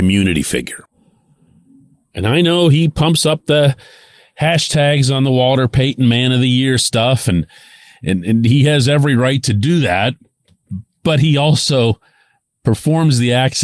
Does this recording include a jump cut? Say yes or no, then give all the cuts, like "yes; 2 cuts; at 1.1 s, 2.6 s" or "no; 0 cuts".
no; 0 cuts